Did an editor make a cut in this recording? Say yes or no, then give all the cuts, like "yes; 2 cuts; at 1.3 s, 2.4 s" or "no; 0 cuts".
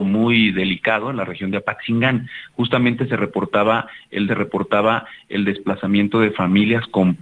yes; 1 cut; at 4.3 s